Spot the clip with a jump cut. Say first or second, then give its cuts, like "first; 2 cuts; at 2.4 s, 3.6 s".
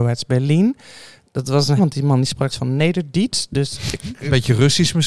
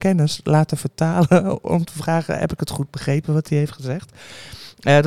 first; 2 cuts; at 1.8 s, 2.5 s